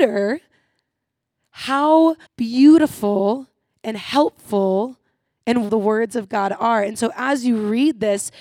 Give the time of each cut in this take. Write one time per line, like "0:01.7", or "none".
0:02.3
0:05.7